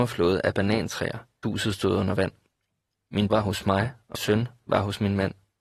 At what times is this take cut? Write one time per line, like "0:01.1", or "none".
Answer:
0:01.4
0:03.3
0:04.1